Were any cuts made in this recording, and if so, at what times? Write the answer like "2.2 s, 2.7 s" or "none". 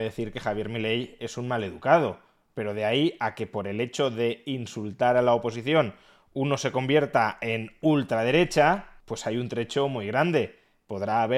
none

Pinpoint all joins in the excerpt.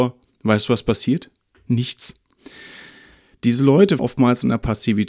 4.0 s

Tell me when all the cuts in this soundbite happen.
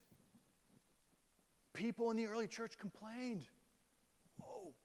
none

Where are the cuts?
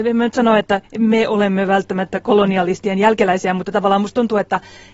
none

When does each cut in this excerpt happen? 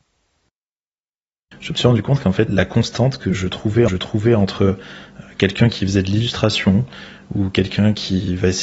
2.5 s, 3.9 s

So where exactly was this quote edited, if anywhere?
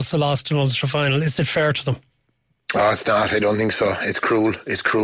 none

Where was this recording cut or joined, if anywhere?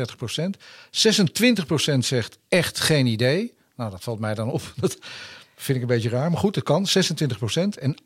none

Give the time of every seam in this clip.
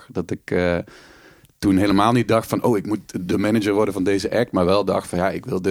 none

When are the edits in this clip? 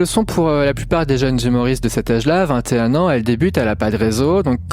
none

